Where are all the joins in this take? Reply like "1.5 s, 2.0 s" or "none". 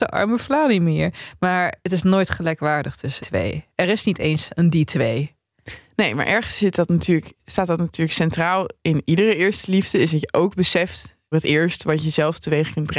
3.2 s, 7.4 s, 11.3 s